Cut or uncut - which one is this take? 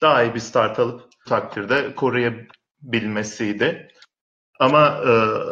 cut